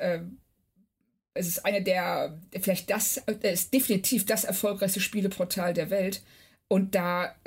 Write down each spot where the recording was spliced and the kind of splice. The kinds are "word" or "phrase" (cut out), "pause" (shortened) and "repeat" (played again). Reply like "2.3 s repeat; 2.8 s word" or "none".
none